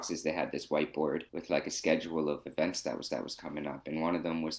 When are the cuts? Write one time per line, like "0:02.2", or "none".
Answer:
0:01.3
0:03.1